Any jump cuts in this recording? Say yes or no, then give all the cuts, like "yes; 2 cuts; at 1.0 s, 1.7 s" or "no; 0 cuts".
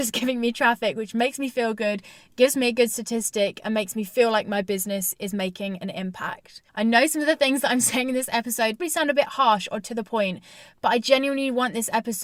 yes; 2 cuts; at 6.7 s, 8.8 s